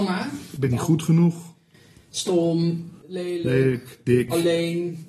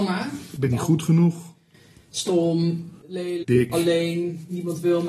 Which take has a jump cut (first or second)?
second